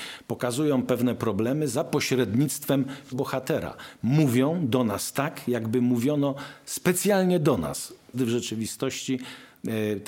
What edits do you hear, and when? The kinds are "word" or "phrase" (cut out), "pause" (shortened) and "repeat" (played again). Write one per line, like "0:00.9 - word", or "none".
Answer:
0:03.1 - word
0:08.1 - word